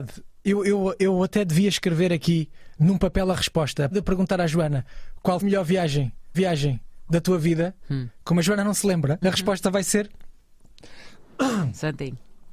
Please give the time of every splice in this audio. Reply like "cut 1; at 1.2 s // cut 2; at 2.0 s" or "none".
cut 1; at 3.9 s // cut 2; at 5.4 s // cut 3; at 6.3 s // cut 4; at 9.2 s